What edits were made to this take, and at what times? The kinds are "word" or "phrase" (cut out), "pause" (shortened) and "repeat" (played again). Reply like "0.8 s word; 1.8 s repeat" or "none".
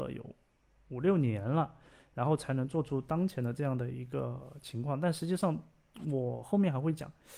none